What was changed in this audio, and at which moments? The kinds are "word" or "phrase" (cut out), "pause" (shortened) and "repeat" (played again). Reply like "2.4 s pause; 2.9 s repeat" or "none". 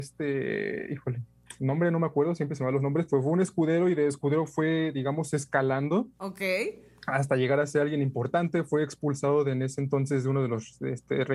none

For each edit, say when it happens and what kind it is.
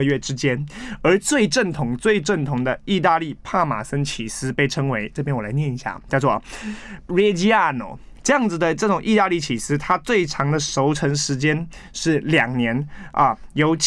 7.1 s word

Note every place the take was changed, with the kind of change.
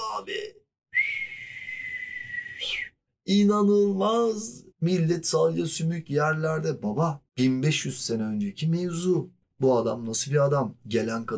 4.7 s pause; 7.3 s pause; 9.4 s pause

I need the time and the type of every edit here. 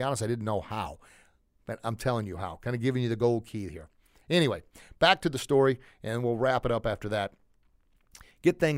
none

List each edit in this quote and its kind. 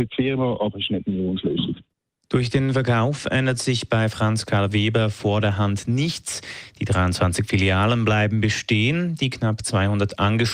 none

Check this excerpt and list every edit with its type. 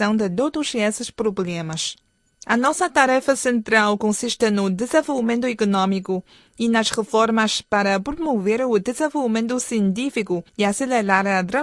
10.5 s pause

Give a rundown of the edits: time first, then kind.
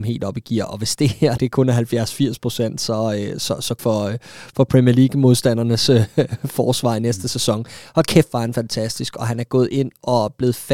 1.4 s word; 3.8 s phrase

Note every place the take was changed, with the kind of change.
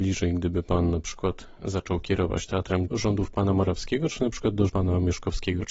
2.9 s word; 4.7 s word

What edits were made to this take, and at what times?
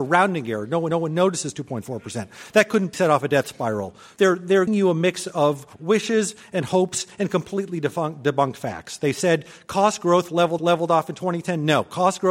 0.9 s repeat; 2.9 s word; 4.7 s word; 10.6 s repeat

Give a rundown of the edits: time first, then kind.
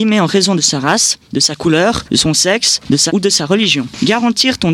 3.1 s word

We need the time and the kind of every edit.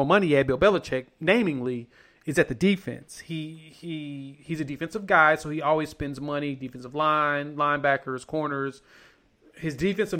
none

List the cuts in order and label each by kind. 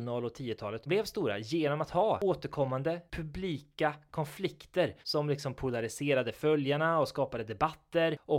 5.0 s pause

